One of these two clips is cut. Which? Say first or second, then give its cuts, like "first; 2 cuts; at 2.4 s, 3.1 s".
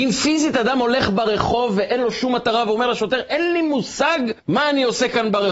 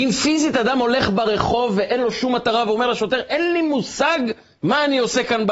first; 1 cut; at 4.4 s